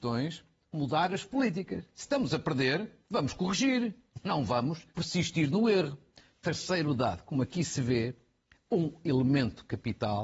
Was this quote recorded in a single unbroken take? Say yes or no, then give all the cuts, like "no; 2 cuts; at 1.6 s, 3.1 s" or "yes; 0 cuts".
no; 1 cut; at 4.9 s